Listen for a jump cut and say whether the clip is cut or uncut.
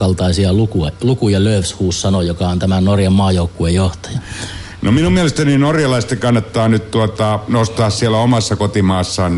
uncut